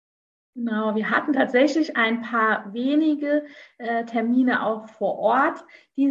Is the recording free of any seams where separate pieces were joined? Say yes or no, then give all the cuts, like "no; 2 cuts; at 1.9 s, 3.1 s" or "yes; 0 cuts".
yes; 0 cuts